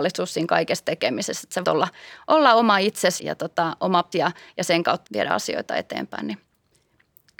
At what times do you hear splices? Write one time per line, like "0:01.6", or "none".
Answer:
0:01.6
0:03.2
0:04.1
0:05.0